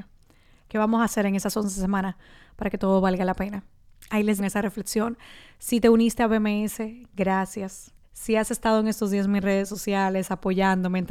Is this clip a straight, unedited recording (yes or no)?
no